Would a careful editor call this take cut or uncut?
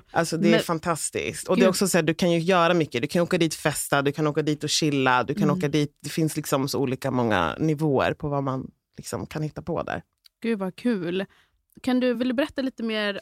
uncut